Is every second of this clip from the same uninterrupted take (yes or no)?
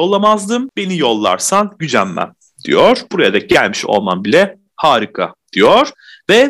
yes